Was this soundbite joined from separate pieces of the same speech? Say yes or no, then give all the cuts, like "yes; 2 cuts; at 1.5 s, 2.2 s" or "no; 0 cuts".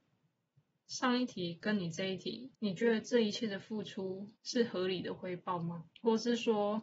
yes; 3 cuts; at 2.5 s, 4.4 s, 5.9 s